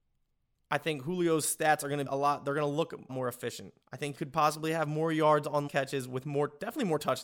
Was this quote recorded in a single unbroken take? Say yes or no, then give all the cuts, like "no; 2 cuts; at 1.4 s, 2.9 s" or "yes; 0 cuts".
no; 5 cuts; at 2.1 s, 3.1 s, 3.8 s, 4.1 s, 5.7 s